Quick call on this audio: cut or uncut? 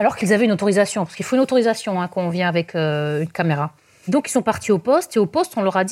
uncut